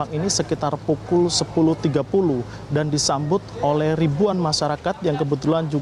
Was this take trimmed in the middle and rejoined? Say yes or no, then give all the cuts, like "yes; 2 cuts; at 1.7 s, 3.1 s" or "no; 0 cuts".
no; 0 cuts